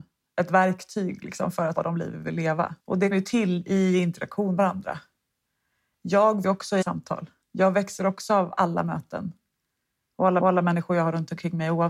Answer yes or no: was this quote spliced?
yes